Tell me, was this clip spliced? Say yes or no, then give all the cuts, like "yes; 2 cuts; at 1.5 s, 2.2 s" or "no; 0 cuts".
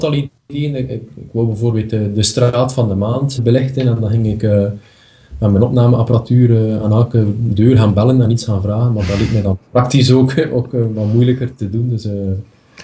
yes; 1 cut; at 3.4 s